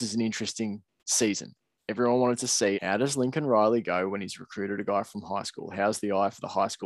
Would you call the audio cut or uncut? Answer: cut